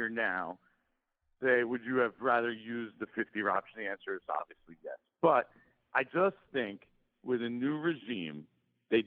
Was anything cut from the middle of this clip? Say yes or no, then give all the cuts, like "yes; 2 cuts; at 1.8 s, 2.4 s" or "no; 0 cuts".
no; 0 cuts